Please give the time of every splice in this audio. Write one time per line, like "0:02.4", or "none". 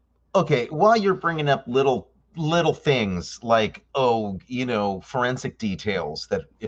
none